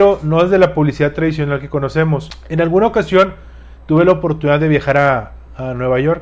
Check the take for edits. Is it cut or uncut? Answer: uncut